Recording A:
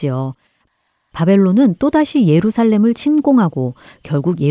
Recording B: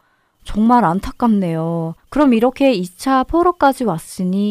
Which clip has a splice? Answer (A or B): B